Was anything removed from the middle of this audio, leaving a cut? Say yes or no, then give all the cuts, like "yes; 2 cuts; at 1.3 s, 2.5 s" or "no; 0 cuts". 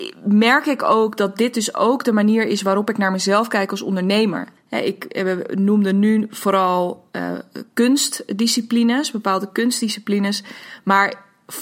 yes; 2 cuts; at 4.6 s, 7.1 s